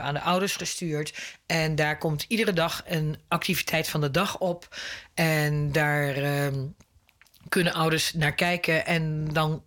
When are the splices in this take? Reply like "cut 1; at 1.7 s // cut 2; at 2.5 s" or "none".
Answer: none